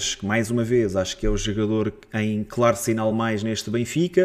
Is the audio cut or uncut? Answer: uncut